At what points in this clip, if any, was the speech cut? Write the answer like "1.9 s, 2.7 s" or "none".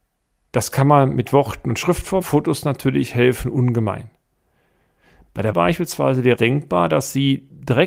2.2 s, 5.5 s, 6.4 s